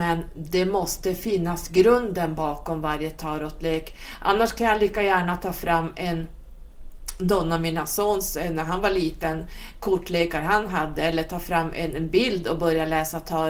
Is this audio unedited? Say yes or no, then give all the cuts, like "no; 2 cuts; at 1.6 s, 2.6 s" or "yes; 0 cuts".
yes; 0 cuts